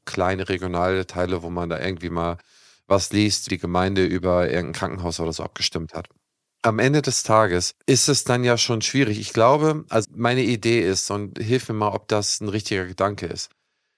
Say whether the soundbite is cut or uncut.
cut